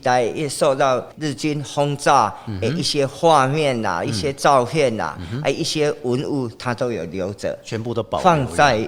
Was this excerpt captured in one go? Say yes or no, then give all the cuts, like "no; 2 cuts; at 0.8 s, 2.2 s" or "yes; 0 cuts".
yes; 0 cuts